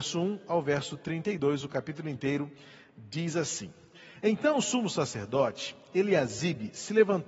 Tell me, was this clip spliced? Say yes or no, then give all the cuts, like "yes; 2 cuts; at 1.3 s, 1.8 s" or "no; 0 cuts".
no; 0 cuts